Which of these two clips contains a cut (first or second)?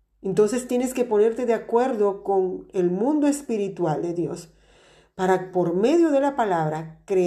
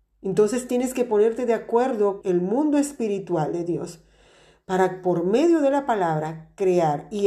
second